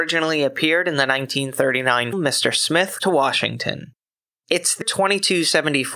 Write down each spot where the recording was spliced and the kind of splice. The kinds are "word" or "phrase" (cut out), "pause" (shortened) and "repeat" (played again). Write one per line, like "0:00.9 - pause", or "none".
0:02.1 - word
0:03.0 - word
0:04.8 - word